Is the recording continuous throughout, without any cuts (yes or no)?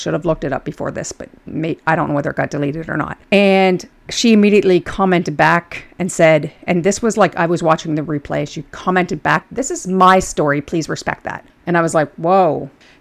yes